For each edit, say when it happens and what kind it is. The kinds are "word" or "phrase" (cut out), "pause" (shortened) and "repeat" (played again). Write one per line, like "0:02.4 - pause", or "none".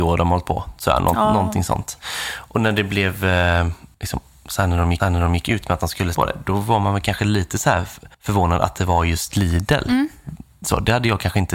0:03.9 - pause
0:05.0 - repeat
0:06.1 - word
0:08.1 - pause